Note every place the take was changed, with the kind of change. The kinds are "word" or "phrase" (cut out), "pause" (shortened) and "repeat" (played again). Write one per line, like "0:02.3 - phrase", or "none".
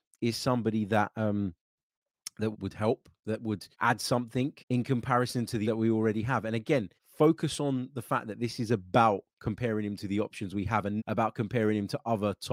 0:02.5 - word
0:03.7 - pause
0:04.6 - pause
0:05.6 - word
0:07.0 - pause
0:11.0 - word